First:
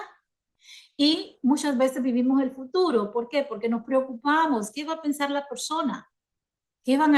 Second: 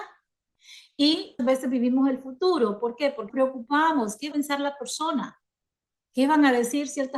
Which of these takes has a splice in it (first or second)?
second